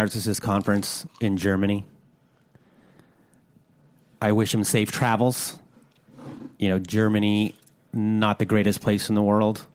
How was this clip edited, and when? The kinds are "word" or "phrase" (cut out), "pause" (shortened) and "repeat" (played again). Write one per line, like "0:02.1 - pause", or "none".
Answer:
none